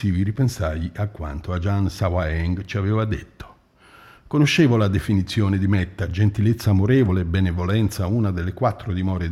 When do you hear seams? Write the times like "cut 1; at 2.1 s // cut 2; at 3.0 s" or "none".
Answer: none